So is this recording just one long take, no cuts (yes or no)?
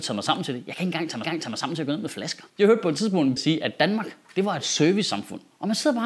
no